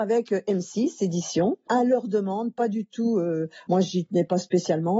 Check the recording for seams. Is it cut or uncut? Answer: uncut